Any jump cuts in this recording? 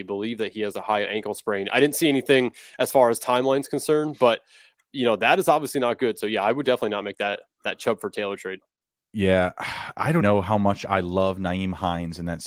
yes; 1 cut; at 10.2 s

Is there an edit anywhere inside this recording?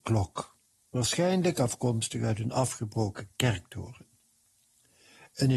no; 0 cuts

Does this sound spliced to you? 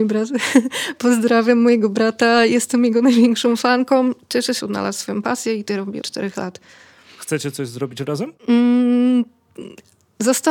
yes; 4 cuts; at 4.6 s, 5.7 s, 6.0 s, 8.4 s

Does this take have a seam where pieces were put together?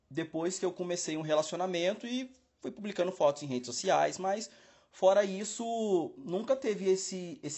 no; 0 cuts

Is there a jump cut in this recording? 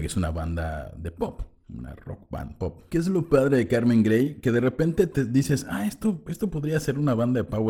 no; 0 cuts

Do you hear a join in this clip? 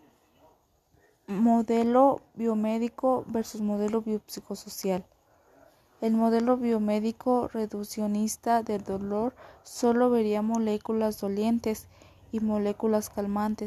no; 0 cuts

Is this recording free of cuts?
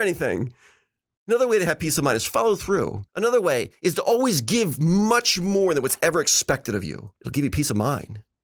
no; 2 cuts; at 3.1 s, 7.2 s

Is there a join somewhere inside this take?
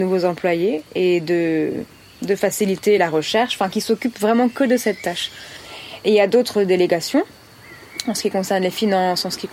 no; 0 cuts

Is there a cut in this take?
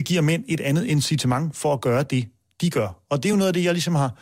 no; 0 cuts

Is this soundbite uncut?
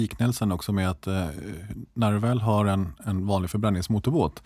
yes; 0 cuts

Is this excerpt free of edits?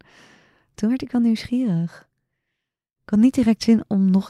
yes; 0 cuts

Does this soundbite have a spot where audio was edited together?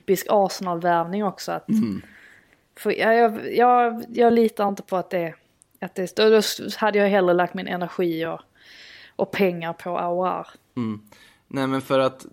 no; 0 cuts

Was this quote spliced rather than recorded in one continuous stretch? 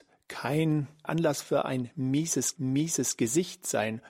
yes; 2 cuts; at 1.0 s, 2.5 s

